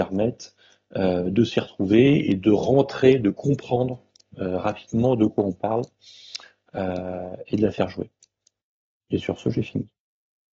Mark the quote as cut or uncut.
uncut